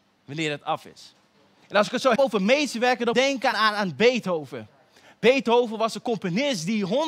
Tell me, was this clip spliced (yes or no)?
yes